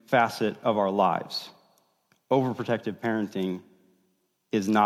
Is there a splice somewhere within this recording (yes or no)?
no